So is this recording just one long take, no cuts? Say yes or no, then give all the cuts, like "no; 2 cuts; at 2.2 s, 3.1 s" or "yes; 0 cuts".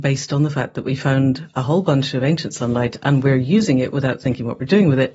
yes; 0 cuts